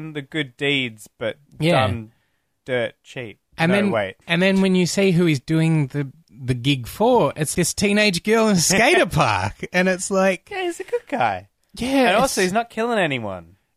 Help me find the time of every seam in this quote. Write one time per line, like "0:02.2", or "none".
0:01.5
0:04.2
0:07.5